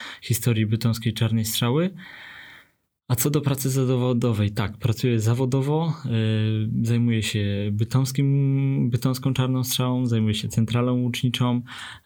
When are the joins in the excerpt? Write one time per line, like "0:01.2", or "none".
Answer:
none